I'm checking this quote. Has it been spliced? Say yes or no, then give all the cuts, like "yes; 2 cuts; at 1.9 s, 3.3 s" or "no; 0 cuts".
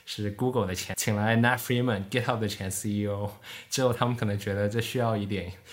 yes; 1 cut; at 0.9 s